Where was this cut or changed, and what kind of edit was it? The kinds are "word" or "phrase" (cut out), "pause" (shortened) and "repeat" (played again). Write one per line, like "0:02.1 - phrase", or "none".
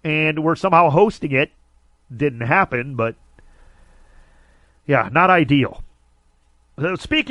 none